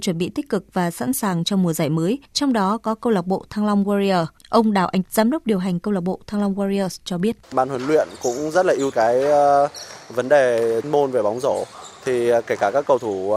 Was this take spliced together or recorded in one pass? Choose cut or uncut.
cut